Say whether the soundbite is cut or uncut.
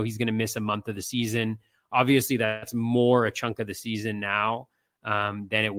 uncut